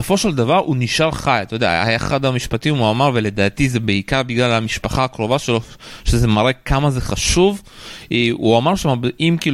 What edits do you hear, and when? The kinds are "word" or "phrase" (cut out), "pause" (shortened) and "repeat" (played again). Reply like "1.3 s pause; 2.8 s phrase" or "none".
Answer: none

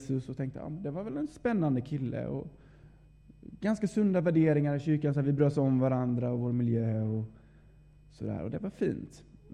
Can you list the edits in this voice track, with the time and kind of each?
none

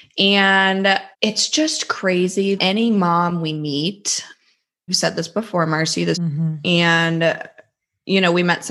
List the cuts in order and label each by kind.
1.1 s pause; 2.6 s word; 4.9 s word; 6.1 s phrase

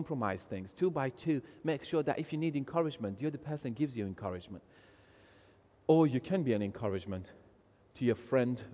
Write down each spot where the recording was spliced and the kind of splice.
none

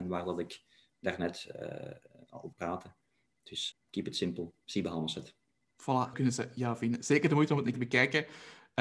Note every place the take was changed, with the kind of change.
2.5 s word; 3.7 s word; 6.1 s word; 7.7 s word

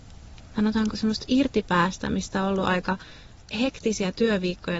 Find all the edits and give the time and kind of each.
none

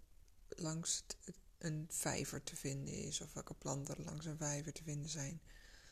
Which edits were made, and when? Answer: none

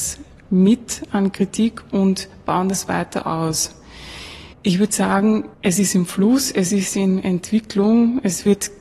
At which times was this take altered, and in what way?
4.5 s pause; 5.5 s pause

